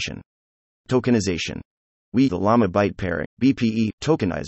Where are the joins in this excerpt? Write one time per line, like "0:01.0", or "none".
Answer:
0:02.3
0:03.2